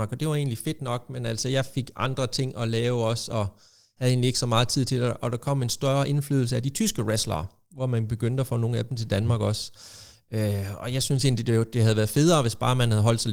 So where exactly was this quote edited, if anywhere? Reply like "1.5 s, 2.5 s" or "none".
none

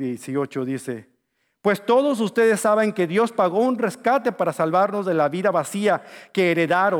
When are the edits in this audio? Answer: none

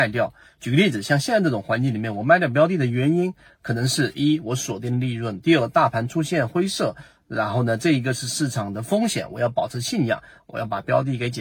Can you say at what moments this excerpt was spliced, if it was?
none

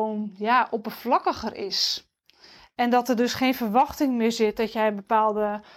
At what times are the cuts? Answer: none

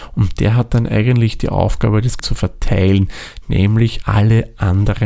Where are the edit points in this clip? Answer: 2.2 s, 4.0 s

